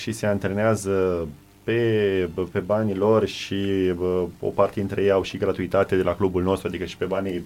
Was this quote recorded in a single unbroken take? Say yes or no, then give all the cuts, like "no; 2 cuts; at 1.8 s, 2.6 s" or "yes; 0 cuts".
yes; 0 cuts